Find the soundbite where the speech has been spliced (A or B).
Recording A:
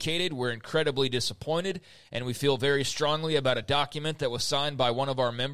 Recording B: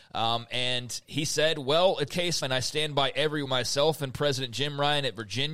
B